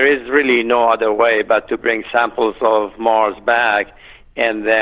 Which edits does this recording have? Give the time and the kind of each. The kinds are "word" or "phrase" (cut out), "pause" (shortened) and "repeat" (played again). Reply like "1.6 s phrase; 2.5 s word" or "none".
none

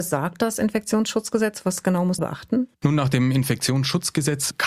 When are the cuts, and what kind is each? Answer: 2.2 s phrase

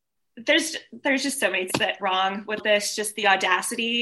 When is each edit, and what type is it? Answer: 1.0 s word; 1.7 s word; 2.0 s word; 2.6 s word

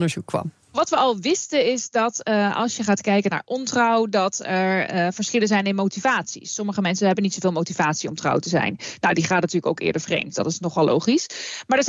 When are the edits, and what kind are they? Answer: none

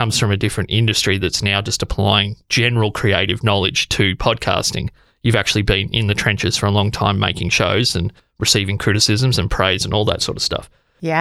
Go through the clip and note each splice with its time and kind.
2.4 s pause

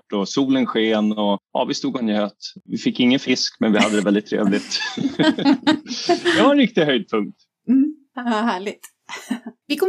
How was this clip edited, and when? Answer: none

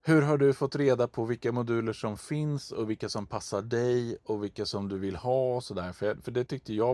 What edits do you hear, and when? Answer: none

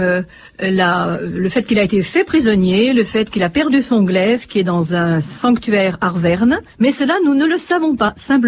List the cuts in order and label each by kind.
6.7 s pause

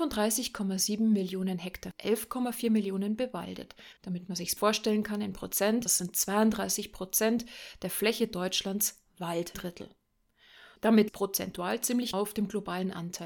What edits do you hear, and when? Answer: 1.9 s phrase; 4.0 s pause; 4.6 s word; 5.9 s word; 9.5 s word; 11.1 s phrase; 12.1 s word

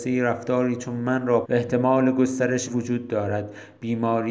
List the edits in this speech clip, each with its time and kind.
1.4 s phrase; 2.7 s word

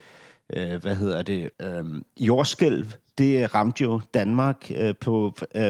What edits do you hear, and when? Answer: 1.5 s pause

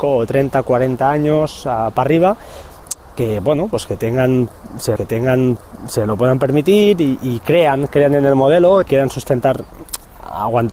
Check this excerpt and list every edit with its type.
5.0 s repeat; 7.2 s word; 8.8 s word

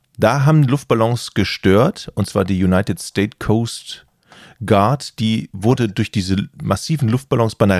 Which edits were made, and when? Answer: none

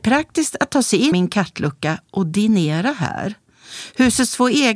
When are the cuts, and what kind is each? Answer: 1.1 s word

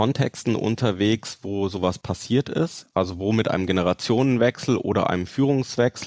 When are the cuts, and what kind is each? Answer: none

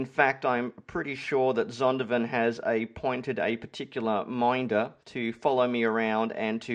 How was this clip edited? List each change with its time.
5.0 s pause

